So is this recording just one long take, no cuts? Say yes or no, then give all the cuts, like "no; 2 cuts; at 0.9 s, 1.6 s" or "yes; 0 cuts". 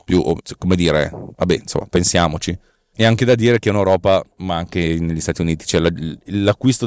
yes; 0 cuts